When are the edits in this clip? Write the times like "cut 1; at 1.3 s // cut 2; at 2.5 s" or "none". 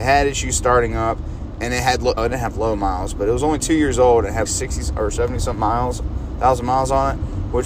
cut 1; at 2.2 s // cut 2; at 4.4 s